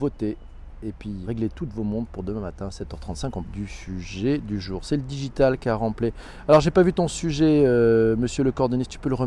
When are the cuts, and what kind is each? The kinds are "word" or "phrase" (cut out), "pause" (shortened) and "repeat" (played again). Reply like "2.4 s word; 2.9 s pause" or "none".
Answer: 1.2 s word; 3.4 s word